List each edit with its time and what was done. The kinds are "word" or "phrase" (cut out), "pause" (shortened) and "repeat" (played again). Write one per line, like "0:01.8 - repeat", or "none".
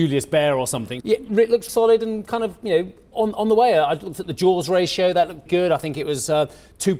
0:01.0 - word
0:01.7 - word
0:05.5 - word